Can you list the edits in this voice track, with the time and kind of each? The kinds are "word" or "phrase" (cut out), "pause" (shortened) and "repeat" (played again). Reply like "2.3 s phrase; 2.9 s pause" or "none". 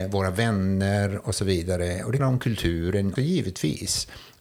2.2 s phrase; 3.2 s word